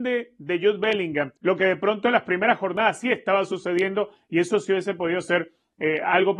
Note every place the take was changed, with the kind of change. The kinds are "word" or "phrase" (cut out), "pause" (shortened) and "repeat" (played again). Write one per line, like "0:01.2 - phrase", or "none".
0:01.4 - pause